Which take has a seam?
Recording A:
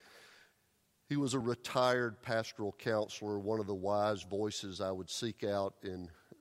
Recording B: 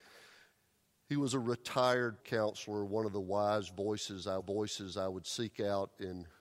B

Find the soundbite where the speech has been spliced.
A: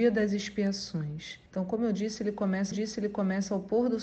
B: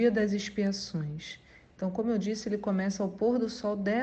A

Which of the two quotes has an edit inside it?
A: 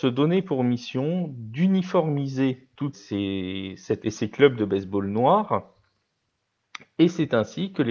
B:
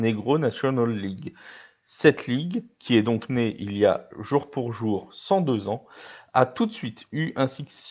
A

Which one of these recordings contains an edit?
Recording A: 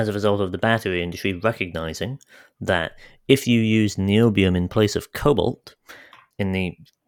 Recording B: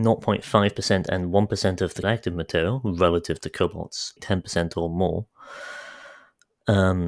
B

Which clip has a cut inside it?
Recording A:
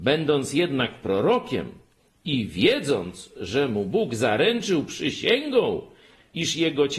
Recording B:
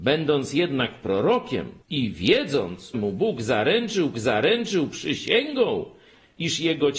B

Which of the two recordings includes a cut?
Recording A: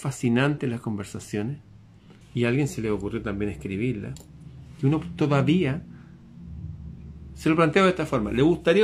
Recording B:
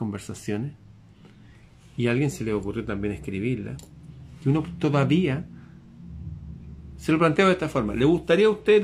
A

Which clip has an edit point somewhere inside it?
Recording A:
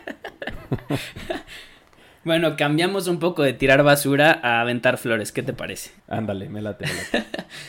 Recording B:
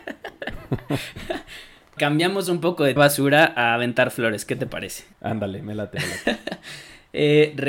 B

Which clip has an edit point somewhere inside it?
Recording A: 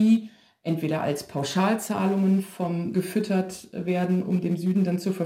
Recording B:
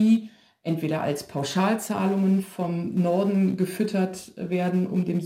A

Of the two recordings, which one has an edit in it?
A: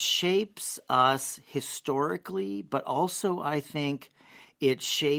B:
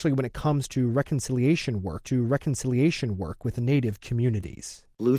B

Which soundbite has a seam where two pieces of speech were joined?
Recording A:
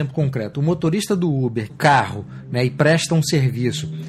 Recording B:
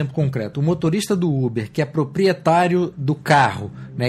A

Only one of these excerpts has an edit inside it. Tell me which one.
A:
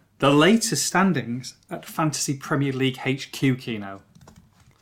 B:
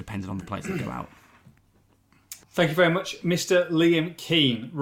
B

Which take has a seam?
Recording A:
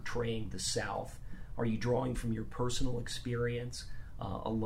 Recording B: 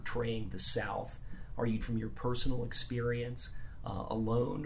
B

